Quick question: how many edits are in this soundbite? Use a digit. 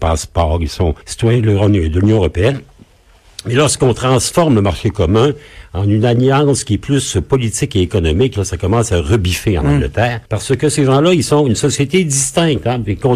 2